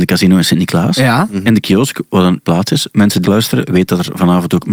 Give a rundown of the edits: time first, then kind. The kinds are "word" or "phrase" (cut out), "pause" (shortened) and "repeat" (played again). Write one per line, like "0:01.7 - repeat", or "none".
0:02.4 - word
0:03.2 - phrase